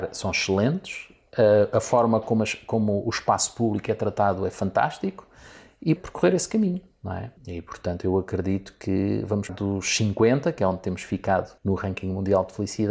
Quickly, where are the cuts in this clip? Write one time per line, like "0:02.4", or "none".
0:06.0
0:07.4
0:09.5
0:11.6